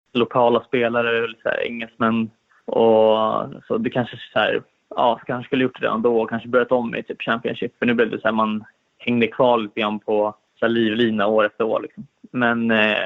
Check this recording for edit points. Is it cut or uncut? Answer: uncut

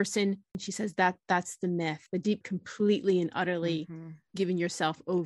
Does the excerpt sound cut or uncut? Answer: cut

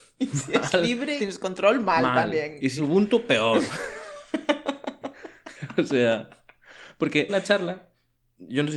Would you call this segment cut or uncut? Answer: cut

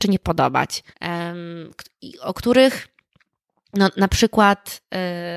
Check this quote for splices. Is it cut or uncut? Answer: cut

